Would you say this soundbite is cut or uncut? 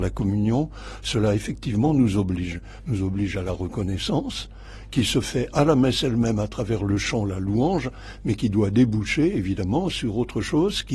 uncut